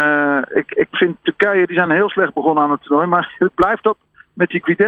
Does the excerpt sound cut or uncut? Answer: uncut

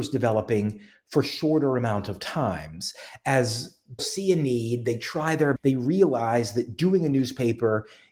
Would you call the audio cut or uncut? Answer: cut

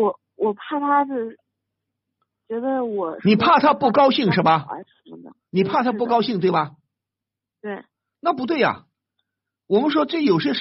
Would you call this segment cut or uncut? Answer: uncut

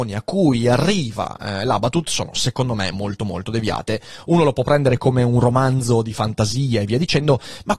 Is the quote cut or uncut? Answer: uncut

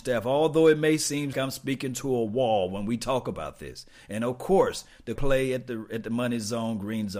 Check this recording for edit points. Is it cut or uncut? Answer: cut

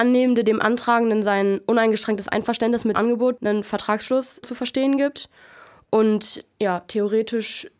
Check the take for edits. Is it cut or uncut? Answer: cut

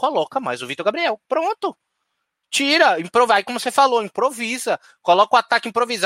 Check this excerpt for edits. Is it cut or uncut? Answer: uncut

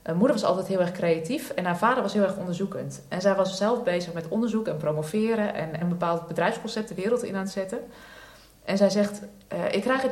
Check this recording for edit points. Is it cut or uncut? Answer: cut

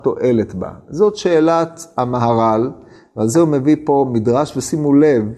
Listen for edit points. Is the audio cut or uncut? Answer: uncut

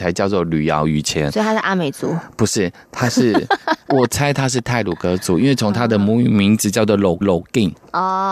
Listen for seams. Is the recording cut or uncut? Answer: cut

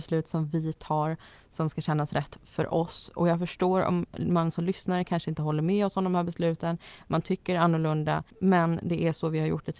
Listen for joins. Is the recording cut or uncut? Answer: cut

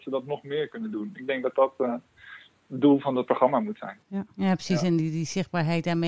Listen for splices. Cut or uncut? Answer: uncut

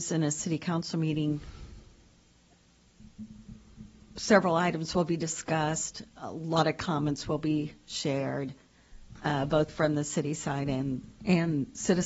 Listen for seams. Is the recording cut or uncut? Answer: uncut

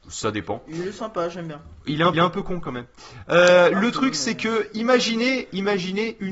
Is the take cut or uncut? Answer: cut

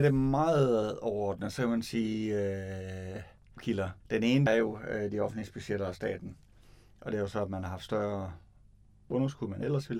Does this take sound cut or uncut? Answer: cut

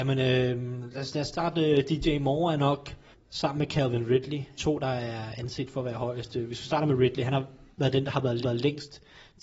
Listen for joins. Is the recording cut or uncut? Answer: cut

